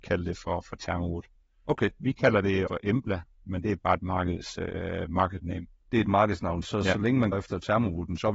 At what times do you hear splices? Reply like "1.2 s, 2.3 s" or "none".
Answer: 2.7 s, 6.6 s, 7.3 s